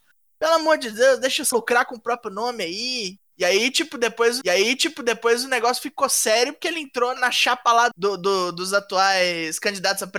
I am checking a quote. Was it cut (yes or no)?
yes